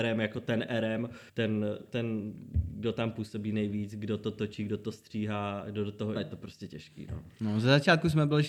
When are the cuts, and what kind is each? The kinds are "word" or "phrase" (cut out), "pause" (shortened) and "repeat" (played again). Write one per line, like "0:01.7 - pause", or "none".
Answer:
0:01.3 - pause
0:06.2 - phrase